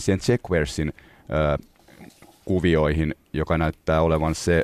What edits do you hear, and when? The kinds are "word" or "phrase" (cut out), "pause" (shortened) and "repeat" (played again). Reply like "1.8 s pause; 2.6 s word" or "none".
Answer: none